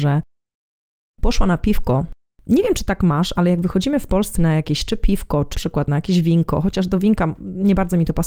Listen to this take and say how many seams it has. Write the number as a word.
two